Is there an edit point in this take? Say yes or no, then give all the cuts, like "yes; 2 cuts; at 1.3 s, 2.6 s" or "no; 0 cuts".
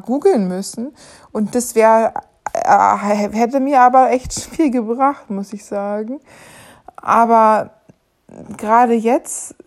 no; 0 cuts